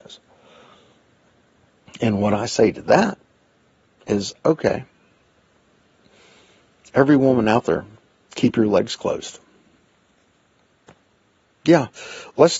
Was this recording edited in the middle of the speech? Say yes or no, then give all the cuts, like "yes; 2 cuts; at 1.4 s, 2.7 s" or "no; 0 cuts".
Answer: no; 0 cuts